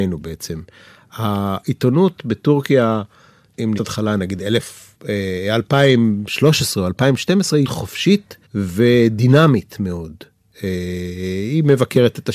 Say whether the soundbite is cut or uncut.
cut